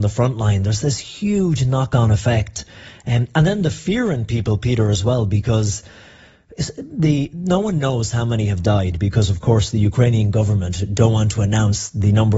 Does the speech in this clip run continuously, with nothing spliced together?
yes; 0 cuts

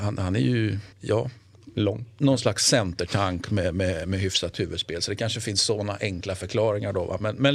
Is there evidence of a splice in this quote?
yes; 1 cut; at 0.9 s

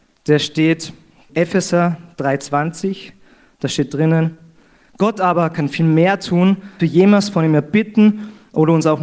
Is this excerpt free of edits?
no; 2 cuts; at 1.3 s, 6.8 s

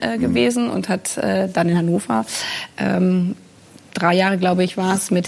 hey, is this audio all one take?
yes; 0 cuts

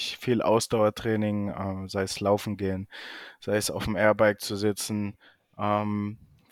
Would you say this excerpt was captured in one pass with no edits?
yes; 0 cuts

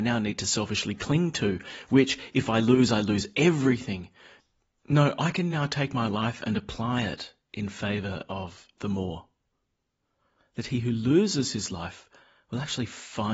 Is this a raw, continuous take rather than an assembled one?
yes; 0 cuts

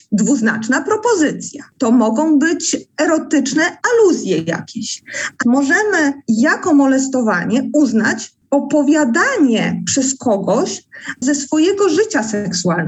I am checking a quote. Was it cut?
yes; 3 cuts; at 3.8 s, 5.4 s, 11.2 s

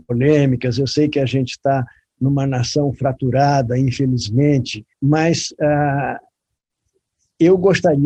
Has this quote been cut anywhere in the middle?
yes; 1 cut; at 4.9 s

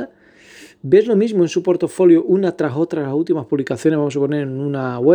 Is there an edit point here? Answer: no; 0 cuts

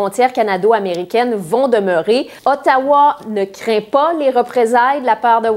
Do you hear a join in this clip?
yes; 1 cut; at 2.4 s

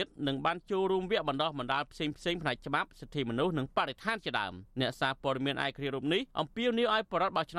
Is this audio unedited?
no; 2 cuts; at 4.7 s, 6.3 s

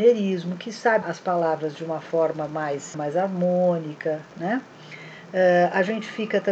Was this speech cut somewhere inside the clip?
yes; 2 cuts; at 1.0 s, 2.9 s

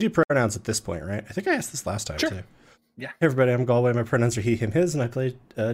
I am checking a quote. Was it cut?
no; 0 cuts

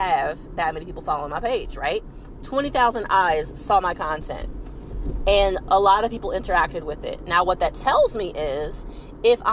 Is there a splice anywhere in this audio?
no; 0 cuts

